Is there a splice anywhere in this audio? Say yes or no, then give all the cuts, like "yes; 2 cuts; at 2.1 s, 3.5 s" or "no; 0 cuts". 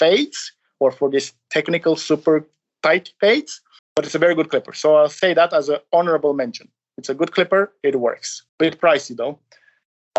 yes; 2 cuts; at 3.8 s, 8.5 s